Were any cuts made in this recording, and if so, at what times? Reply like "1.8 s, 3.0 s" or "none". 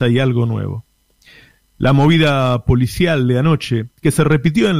none